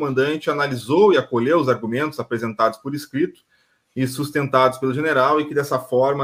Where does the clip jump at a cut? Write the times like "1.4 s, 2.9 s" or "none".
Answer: none